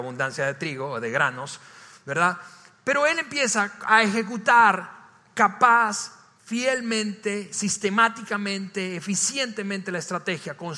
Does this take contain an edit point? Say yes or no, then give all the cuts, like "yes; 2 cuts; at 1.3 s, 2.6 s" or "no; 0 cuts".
no; 0 cuts